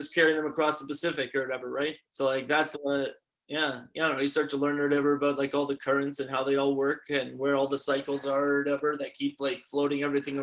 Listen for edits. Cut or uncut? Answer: cut